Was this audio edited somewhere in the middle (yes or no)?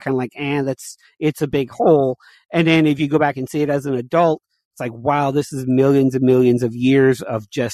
no